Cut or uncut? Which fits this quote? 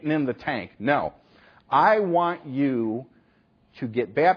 uncut